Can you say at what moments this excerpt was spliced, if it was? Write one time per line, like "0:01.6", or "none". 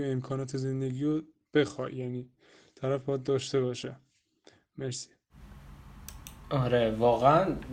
none